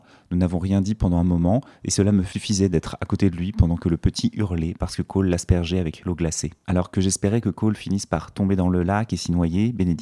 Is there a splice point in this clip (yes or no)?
no